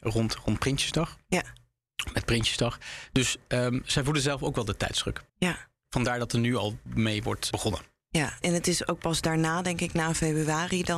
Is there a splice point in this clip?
yes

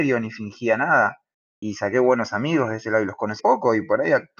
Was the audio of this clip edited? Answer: yes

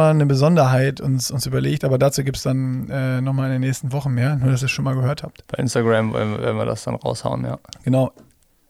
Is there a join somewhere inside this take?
no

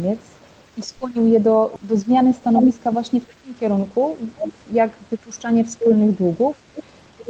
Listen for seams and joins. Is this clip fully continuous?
yes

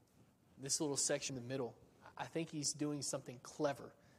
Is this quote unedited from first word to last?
no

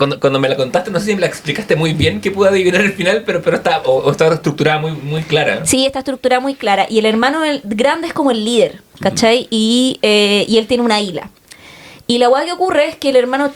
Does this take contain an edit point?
no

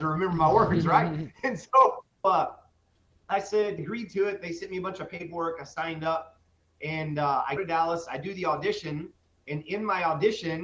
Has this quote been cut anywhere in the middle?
yes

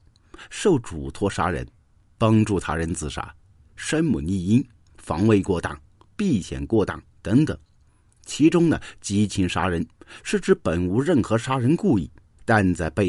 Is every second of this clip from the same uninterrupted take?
yes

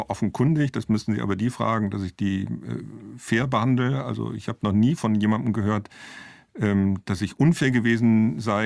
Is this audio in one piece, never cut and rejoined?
yes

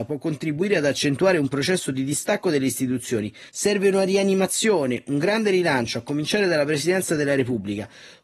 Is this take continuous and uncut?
no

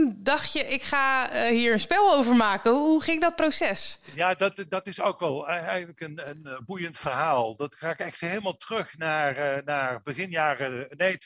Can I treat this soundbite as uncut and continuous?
yes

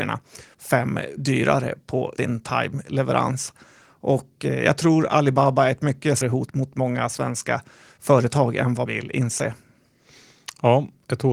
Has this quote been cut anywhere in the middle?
yes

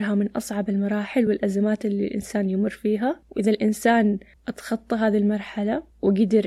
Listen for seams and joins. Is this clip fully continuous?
yes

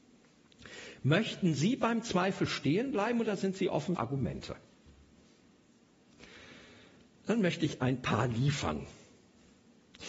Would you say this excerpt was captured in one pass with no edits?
no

